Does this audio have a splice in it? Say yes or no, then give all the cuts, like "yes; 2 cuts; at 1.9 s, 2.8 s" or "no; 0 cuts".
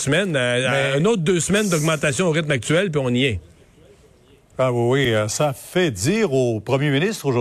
no; 0 cuts